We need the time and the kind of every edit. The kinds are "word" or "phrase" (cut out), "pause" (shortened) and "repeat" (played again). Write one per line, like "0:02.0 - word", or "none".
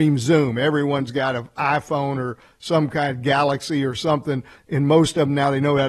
none